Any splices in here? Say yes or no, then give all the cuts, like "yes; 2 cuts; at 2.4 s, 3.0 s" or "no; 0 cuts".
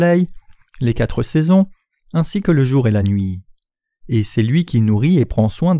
no; 0 cuts